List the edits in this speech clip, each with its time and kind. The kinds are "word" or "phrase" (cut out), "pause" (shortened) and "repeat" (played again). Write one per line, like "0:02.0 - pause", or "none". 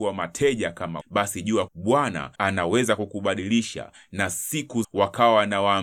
0:01.0 - word
0:01.7 - word
0:02.3 - pause
0:04.8 - word